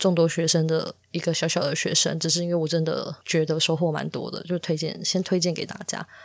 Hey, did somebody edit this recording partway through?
yes; 1 cut; at 3.2 s

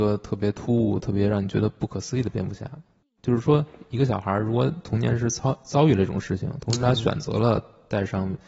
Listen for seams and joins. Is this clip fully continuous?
yes; 0 cuts

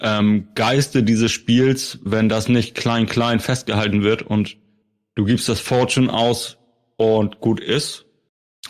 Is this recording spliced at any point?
no; 0 cuts

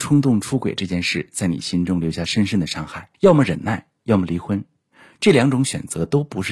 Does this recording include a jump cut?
yes; 1 cut; at 3.1 s

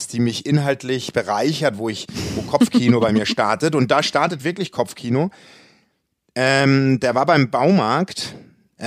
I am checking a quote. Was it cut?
no; 0 cuts

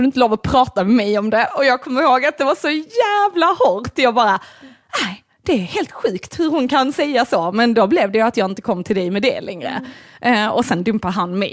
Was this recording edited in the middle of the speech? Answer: no; 0 cuts

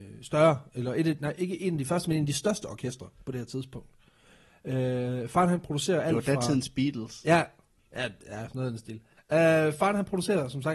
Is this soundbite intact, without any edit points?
no; 1 cut; at 9.2 s

